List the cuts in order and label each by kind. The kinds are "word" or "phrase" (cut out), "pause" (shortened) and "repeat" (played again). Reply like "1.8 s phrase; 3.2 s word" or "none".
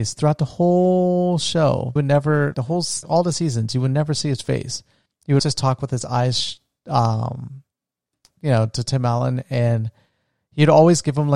2.0 s word; 2.5 s word; 3.0 s word; 5.1 s pause; 5.4 s word; 8.3 s word